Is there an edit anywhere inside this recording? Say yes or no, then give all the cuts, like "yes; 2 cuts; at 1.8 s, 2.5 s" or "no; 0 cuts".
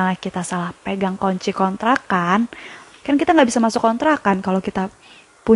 no; 0 cuts